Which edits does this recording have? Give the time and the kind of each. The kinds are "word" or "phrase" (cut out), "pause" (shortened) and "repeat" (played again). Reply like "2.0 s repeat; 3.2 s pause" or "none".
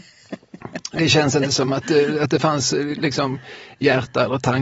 none